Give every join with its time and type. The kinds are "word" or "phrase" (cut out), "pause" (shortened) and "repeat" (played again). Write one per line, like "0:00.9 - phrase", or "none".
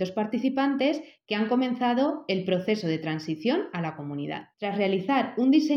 0:04.5 - pause